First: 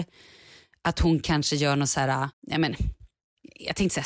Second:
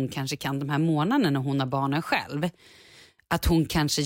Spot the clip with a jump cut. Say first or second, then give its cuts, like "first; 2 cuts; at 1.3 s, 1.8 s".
first; 1 cut; at 2.3 s